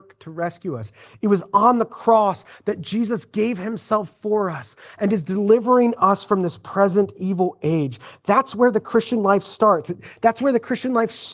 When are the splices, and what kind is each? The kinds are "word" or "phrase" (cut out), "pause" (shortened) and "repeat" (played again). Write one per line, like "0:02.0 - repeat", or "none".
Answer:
none